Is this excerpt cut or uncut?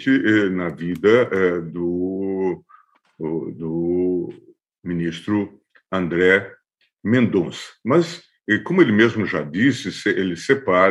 uncut